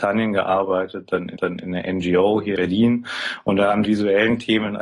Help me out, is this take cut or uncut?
cut